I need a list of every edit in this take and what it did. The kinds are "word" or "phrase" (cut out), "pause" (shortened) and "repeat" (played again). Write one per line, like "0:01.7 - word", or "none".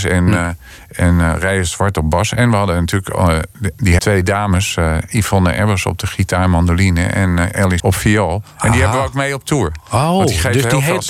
0:04.0 - phrase
0:07.8 - word